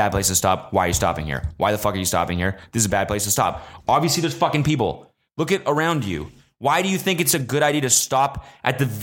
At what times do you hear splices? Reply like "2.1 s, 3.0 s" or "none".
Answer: none